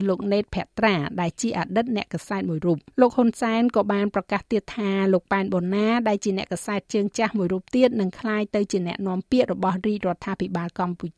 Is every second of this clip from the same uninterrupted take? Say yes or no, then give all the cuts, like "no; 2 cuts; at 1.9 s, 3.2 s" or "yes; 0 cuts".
no; 1 cut; at 2.9 s